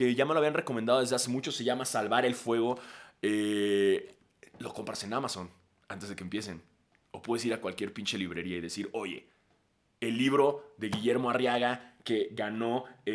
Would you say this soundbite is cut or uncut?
uncut